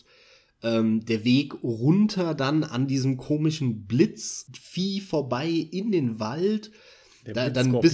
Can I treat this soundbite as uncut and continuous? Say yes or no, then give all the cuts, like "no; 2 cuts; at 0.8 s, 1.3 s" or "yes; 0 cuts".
yes; 0 cuts